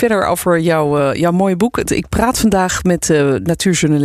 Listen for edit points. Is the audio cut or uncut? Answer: uncut